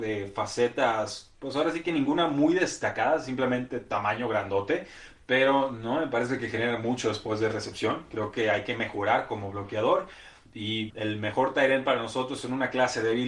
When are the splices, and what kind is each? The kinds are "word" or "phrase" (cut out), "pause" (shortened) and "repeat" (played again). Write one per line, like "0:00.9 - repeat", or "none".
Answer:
0:10.9 - word